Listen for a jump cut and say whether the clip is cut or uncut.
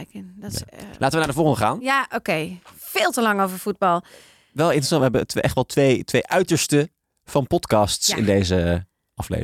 uncut